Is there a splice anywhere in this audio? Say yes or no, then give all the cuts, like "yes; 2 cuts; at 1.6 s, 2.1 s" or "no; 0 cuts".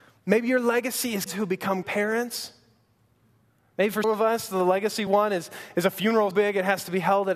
yes; 5 cuts; at 1.3 s, 1.8 s, 4.0 s, 5.1 s, 6.3 s